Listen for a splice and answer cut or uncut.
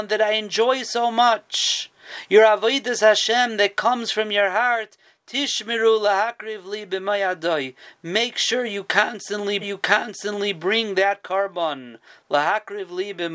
cut